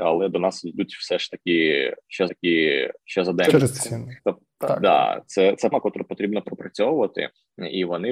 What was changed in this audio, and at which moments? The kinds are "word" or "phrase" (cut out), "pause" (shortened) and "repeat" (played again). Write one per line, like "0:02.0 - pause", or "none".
0:02.3 - repeat
0:04.2 - pause
0:05.7 - word